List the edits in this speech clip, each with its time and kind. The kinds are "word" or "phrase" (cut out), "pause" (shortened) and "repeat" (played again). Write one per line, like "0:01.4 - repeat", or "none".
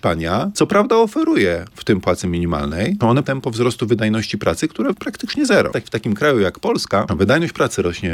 0:01.7 - phrase
0:03.2 - word
0:04.9 - word